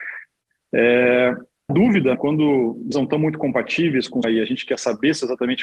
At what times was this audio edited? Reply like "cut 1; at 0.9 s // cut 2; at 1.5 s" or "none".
cut 1; at 1.7 s // cut 2; at 2.1 s // cut 3; at 2.9 s // cut 4; at 4.2 s